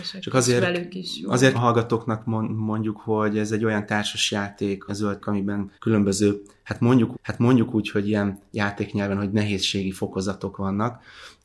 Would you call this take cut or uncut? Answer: cut